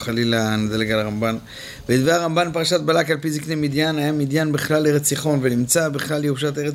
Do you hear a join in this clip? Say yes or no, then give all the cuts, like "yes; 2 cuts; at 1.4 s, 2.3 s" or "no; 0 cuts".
no; 0 cuts